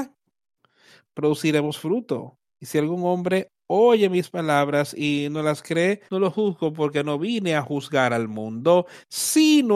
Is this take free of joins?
no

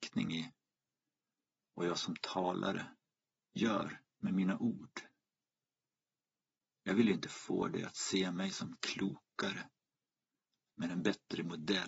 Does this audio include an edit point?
no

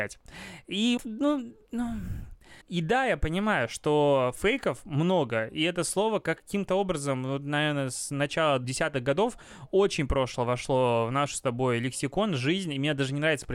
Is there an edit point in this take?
yes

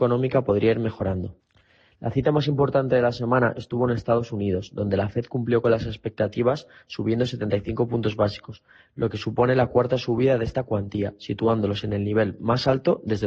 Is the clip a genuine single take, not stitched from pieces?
yes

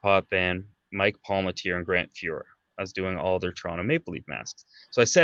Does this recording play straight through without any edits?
yes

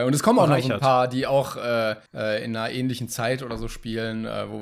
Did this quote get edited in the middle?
yes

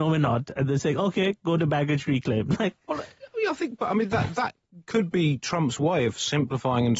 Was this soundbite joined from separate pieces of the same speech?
no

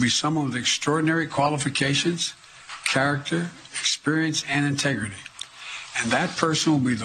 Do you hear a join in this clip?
no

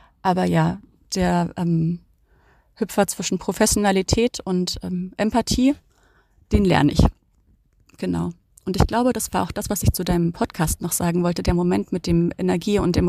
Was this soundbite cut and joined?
no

